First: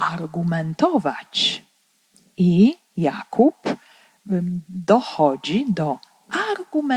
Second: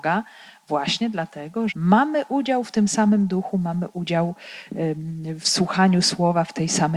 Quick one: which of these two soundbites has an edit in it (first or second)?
second